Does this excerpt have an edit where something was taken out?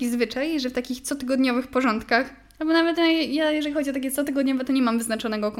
no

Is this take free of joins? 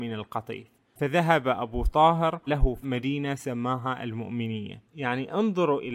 no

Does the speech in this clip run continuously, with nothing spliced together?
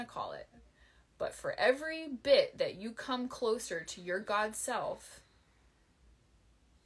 yes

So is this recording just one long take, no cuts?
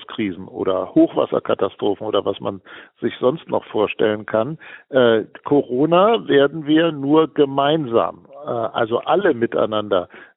yes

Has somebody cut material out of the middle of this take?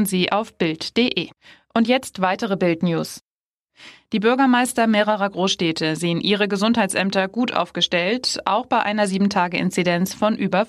yes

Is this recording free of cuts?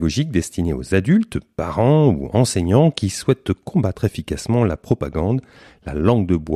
yes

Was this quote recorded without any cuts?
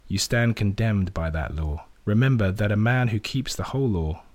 no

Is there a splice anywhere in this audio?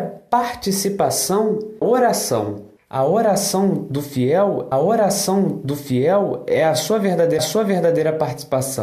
yes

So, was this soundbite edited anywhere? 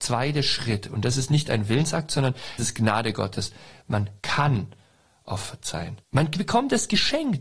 yes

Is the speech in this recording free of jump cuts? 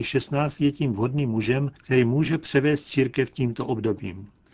no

